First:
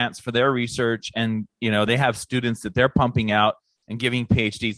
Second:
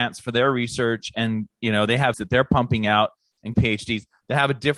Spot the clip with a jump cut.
second; 2 cuts; at 2.1 s, 3.5 s

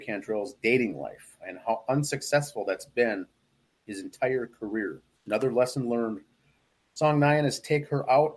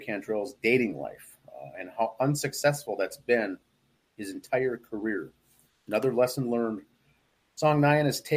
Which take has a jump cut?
first; 2 cuts; at 1.4 s, 5.1 s

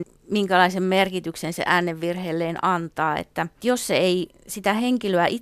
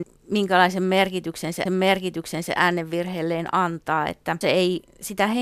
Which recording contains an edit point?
second; 2 cuts; at 1.7 s, 4.4 s

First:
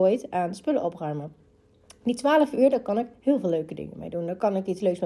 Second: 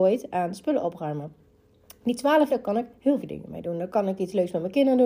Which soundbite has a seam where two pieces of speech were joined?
second; 2 cuts; at 2.5 s, 3.2 s

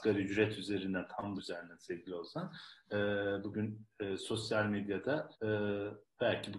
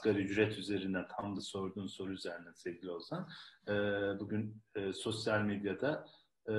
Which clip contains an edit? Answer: first; 2 cuts; at 1.4 s, 5.3 s

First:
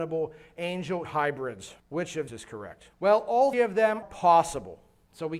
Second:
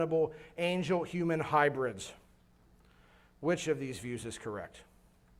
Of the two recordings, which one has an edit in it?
first; 6 cuts; at 1.0 s, 1.8 s, 2.3 s, 2.9 s, 3.5 s, 4.0 s

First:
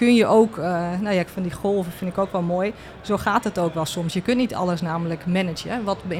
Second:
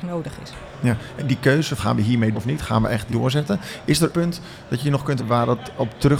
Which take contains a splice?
second; 6 cuts; at 1.2 s, 1.8 s, 2.3 s, 3.1 s, 4.1 s, 5.2 s

